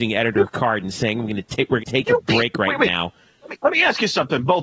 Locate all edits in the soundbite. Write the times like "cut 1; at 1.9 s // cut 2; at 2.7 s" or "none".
cut 1; at 1.8 s